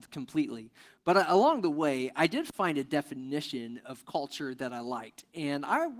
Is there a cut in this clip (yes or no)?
no